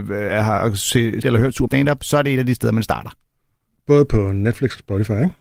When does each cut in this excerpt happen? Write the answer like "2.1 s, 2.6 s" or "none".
1.2 s, 1.7 s